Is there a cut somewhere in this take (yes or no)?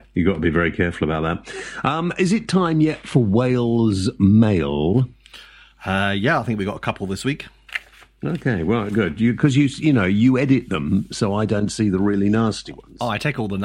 no